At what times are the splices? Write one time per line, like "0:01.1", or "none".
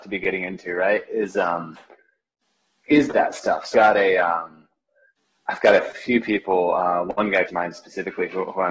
0:03.7
0:07.5

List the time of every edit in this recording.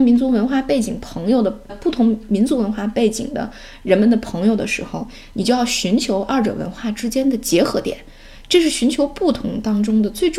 0:01.7

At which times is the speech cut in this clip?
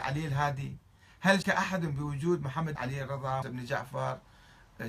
0:01.4
0:02.8
0:03.4

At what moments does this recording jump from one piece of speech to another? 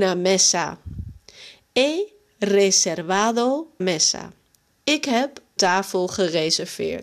0:03.8
0:05.6

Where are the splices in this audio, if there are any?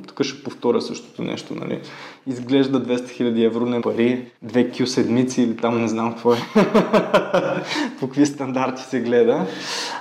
0:03.8
0:04.4

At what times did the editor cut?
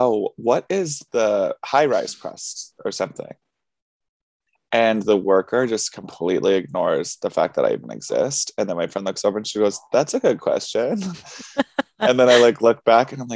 none

